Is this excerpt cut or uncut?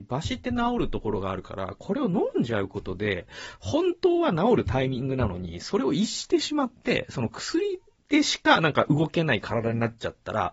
cut